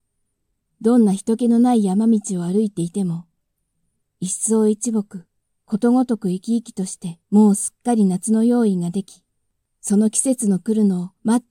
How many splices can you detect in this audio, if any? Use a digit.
1